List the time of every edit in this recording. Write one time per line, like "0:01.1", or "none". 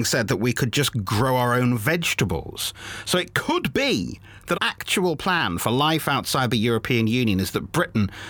0:04.5